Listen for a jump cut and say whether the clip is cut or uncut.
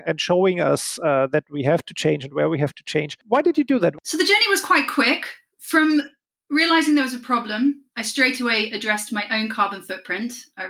uncut